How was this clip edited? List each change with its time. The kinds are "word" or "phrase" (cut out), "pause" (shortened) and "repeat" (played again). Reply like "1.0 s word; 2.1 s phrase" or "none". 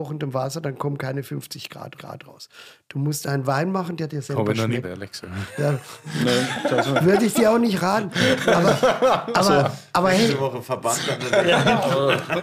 2.0 s repeat; 4.8 s phrase

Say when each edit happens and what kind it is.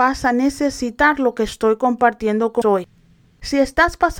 2.6 s word

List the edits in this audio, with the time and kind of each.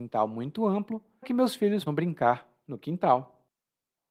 1.2 s word; 1.9 s word

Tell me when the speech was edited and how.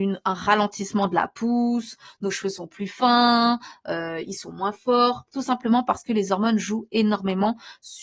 none

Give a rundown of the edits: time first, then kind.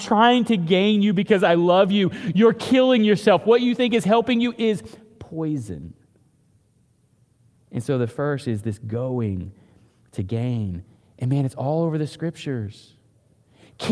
none

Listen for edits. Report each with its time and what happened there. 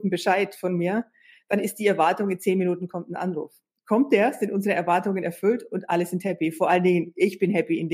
none

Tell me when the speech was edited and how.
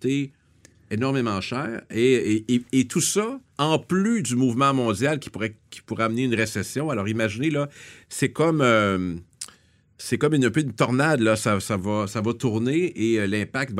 3.5 s pause

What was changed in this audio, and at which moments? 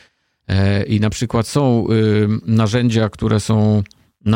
none

